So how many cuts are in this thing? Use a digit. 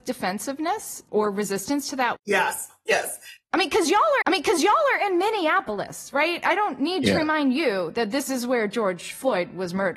3